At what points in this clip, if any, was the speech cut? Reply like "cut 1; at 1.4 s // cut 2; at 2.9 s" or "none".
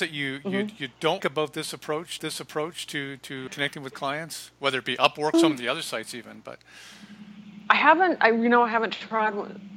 cut 1; at 1.2 s // cut 2; at 2.2 s // cut 3; at 3.5 s // cut 4; at 5.3 s